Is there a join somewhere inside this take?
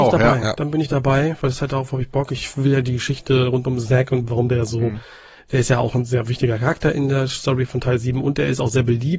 no; 0 cuts

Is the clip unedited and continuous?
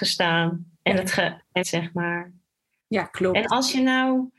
no; 1 cut; at 1.6 s

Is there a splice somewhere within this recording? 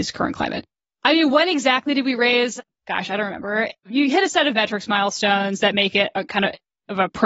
no; 0 cuts

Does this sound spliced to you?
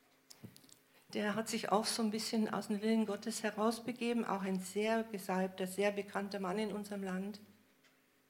no; 0 cuts

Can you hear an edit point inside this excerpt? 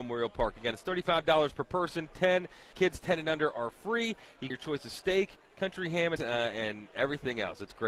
yes; 3 cuts; at 2.7 s, 4.5 s, 6.2 s

